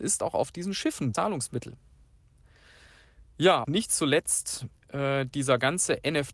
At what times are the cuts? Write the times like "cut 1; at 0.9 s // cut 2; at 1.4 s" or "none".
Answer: cut 1; at 1.1 s // cut 2; at 3.6 s // cut 3; at 4.8 s